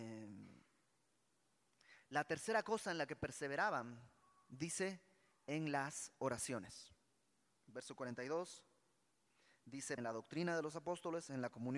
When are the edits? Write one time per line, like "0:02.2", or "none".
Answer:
0:10.0